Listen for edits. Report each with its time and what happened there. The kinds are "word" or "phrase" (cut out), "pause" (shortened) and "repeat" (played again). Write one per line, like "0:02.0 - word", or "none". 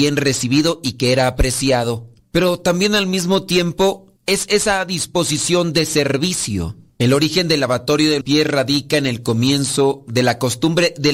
0:08.2 - word